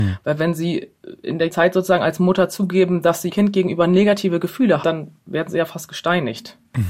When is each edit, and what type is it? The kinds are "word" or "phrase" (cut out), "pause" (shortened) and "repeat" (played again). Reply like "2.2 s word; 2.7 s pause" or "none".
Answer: 1.5 s word; 3.3 s word; 4.8 s word